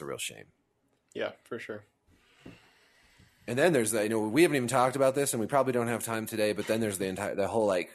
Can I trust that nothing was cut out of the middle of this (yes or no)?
yes